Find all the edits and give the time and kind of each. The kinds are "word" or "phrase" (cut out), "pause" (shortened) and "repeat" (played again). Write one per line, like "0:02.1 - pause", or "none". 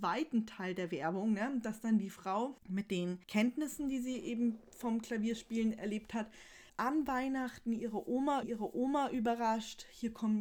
0:02.6 - pause
0:03.2 - pause
0:06.7 - pause
0:08.4 - repeat